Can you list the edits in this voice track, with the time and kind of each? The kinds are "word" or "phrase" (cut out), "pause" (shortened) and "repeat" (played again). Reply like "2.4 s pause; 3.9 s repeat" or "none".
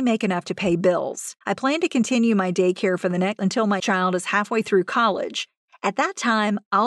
1.4 s pause; 3.4 s phrase; 3.8 s word